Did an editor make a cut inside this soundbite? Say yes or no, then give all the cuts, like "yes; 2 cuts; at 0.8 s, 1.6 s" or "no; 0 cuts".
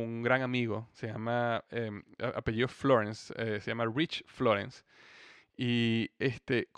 no; 0 cuts